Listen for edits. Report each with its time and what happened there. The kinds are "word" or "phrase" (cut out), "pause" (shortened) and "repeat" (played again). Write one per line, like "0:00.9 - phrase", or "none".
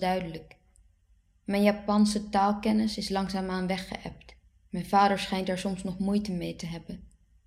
0:04.4 - pause